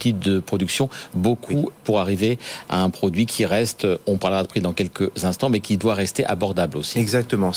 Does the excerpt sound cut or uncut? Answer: cut